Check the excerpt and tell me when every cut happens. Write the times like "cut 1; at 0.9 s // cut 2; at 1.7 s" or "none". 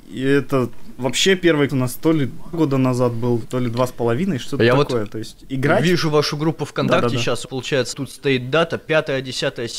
cut 1; at 1.0 s // cut 2; at 1.7 s // cut 3; at 2.5 s // cut 4; at 3.4 s // cut 5; at 7.4 s // cut 6; at 7.9 s